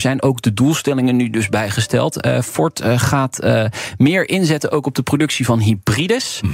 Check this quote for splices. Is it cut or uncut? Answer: uncut